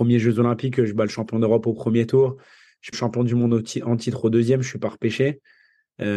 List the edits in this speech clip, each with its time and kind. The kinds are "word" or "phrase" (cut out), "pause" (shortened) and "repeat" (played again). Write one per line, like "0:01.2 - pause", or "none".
0:02.9 - phrase